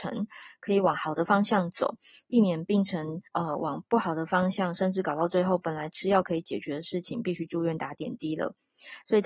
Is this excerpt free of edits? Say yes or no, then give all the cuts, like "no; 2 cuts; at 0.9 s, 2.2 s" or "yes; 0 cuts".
no; 1 cut; at 3.3 s